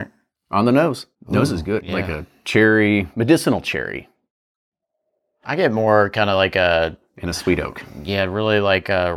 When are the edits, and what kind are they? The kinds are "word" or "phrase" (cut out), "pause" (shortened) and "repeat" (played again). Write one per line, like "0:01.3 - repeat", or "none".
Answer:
0:01.1 - pause
0:01.8 - phrase
0:05.4 - word